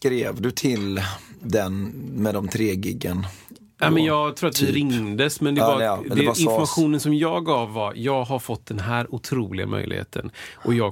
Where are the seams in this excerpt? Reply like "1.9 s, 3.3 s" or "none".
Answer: none